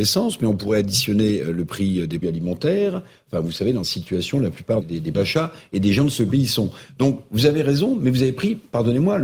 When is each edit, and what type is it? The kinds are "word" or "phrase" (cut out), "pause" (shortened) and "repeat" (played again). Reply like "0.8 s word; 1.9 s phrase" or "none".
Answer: 2.2 s word; 3.8 s word; 4.8 s word; 5.1 s word